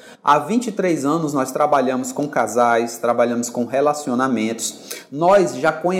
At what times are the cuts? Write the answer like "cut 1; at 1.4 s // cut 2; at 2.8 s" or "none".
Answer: none

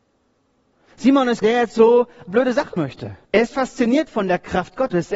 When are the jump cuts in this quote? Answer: cut 1; at 1.4 s // cut 2; at 2.3 s // cut 3; at 2.8 s // cut 4; at 3.2 s

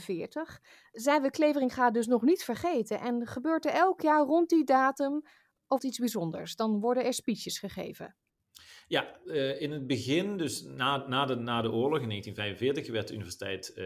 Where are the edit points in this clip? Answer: cut 1; at 5.8 s

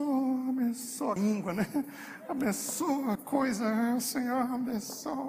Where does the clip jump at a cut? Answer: cut 1; at 1.2 s // cut 2; at 3.2 s

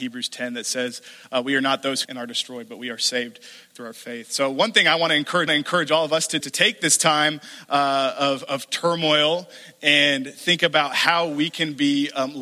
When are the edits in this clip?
cut 1; at 2.0 s // cut 2; at 5.5 s // cut 3; at 6.4 s

